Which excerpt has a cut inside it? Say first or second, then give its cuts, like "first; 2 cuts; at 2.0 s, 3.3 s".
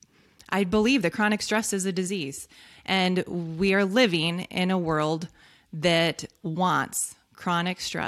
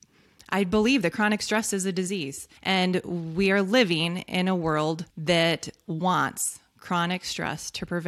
second; 2 cuts; at 2.6 s, 5.1 s